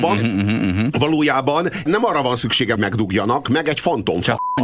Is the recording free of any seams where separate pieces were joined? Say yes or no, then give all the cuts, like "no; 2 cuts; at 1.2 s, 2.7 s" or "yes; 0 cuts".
no; 3 cuts; at 1.9 s, 2.8 s, 3.4 s